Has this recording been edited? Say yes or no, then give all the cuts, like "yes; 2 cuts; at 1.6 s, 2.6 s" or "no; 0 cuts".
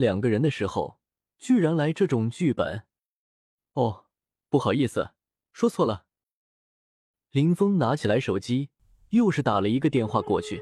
no; 0 cuts